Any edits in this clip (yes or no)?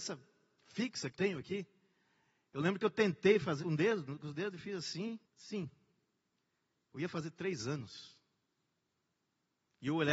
yes